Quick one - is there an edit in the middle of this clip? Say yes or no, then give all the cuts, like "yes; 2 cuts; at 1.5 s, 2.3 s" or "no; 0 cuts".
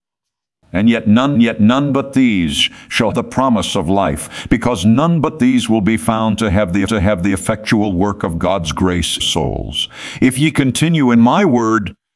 yes; 4 cuts; at 1.3 s, 3.1 s, 6.9 s, 9.2 s